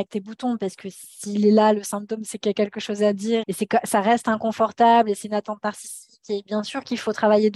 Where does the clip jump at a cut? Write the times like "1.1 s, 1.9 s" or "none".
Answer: 3.4 s